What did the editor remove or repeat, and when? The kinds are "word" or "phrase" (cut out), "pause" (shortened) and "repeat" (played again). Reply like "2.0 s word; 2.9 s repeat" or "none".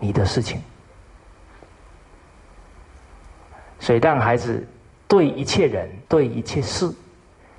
6.1 s pause